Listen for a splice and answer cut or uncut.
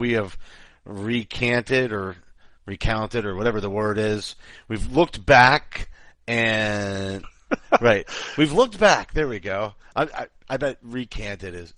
uncut